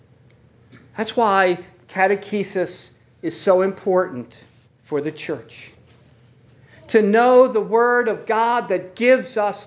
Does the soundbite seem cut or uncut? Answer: uncut